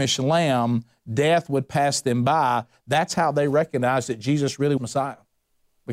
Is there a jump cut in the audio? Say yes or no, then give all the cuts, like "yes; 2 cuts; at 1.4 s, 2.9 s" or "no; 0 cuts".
yes; 1 cut; at 4.8 s